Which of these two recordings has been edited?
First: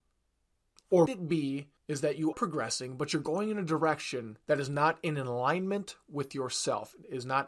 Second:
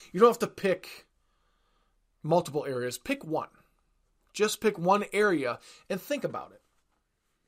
first; 4 cuts; at 1.1 s, 1.8 s, 2.3 s, 4.4 s

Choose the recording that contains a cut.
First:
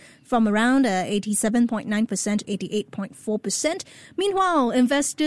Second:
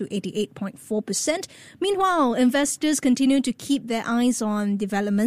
first; 1 cut; at 2.4 s

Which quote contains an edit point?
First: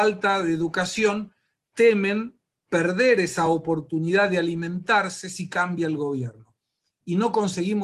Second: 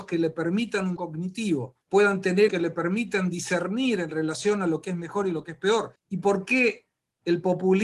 second; 4 cuts; at 1.0 s, 1.8 s, 2.5 s, 6.0 s

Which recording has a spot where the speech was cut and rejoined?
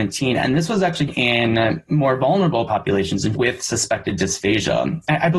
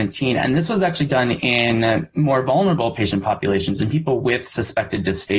first; 3 cuts; at 1.1 s, 2.7 s, 3.3 s

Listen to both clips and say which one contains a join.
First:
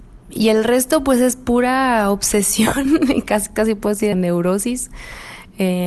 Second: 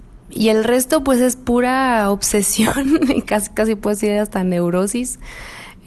first; 1 cut; at 4.1 s

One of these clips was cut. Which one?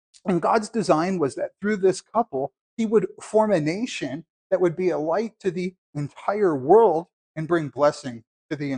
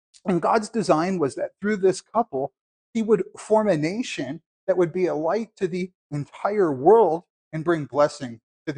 first; 1 cut; at 2.6 s

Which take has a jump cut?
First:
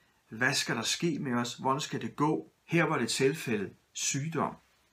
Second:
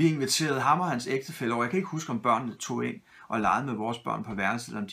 first; 1 cut; at 2.6 s

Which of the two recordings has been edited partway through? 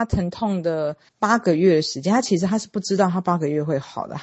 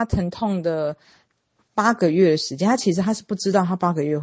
first; 1 cut; at 1.1 s

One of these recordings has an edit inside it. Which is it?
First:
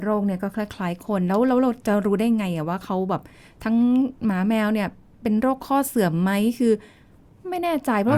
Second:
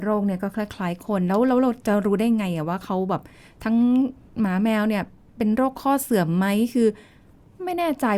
first; 1 cut; at 4.2 s

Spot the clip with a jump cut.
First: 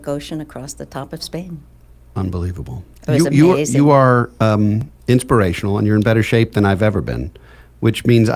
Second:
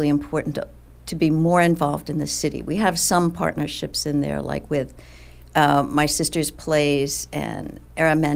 first; 1 cut; at 5.0 s

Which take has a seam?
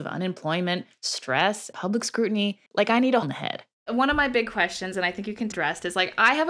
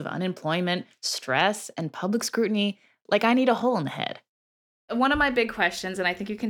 first; 5 cuts; at 1.7 s, 2.7 s, 3.2 s, 3.7 s, 5.5 s

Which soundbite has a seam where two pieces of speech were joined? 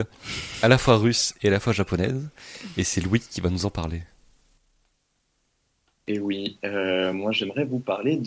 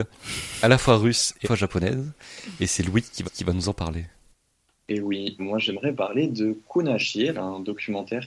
second; 6 cuts; at 1.4 s, 3.2 s, 4.3 s, 5.4 s, 5.9 s, 7.3 s

